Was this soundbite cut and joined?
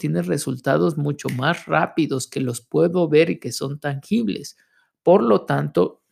no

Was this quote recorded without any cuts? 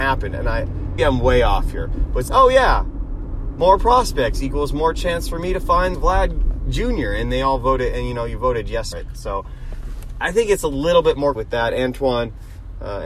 no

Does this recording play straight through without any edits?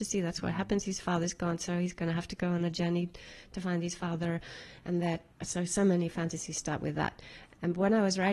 no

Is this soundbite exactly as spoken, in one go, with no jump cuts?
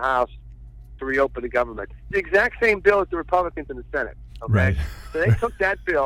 no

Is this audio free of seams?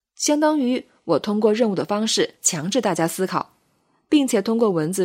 no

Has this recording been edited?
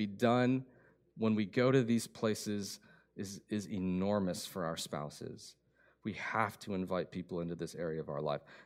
no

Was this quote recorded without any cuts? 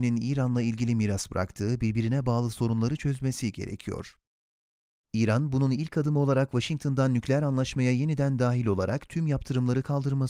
yes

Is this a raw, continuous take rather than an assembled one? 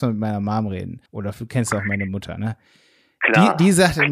no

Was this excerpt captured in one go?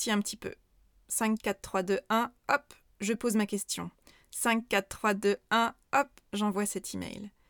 yes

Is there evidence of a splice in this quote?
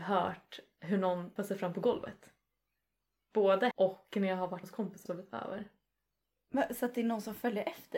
yes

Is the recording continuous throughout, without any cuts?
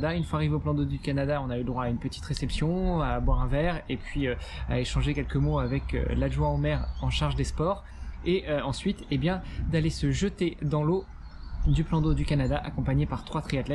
yes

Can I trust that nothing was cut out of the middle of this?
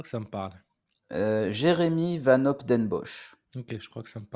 no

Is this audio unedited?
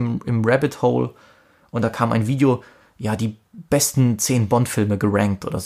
yes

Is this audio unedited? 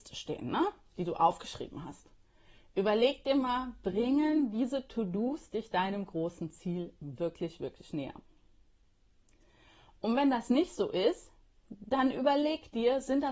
yes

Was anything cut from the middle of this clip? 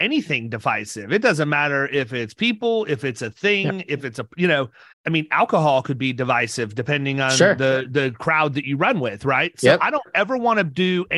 yes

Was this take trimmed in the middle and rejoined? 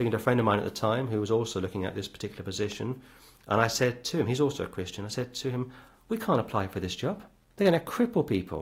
no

